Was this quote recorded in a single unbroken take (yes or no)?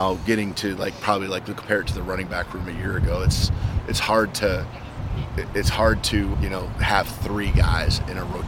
no